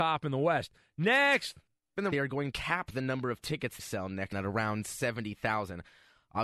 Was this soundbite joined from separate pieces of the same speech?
yes; 5 cuts; at 1.7 s, 2.1 s, 2.5 s, 3.8 s, 4.3 s

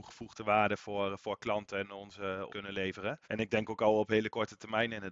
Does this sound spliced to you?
yes; 2 cuts; at 2.5 s, 3.2 s

